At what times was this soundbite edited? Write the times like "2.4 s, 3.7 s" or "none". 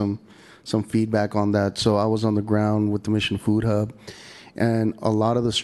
none